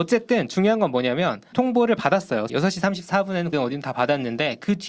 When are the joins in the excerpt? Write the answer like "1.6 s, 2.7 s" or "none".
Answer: 1.5 s, 2.5 s, 3.5 s